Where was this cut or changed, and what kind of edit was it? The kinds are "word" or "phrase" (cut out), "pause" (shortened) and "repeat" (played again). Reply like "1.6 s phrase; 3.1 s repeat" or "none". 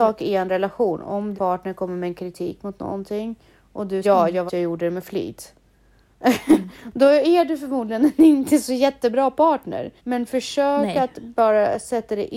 1.3 s word; 4.0 s word; 4.5 s word; 10.0 s pause